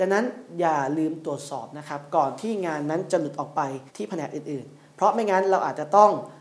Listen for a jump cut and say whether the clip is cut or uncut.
cut